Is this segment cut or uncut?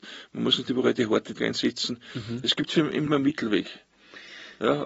cut